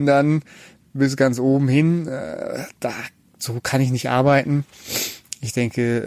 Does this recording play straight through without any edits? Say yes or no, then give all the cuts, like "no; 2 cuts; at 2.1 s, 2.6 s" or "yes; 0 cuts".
yes; 0 cuts